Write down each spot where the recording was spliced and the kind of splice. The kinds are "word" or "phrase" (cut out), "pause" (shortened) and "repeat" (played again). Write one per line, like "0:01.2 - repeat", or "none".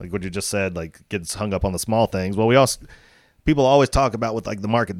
none